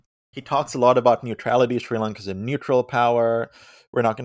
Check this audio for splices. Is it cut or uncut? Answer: uncut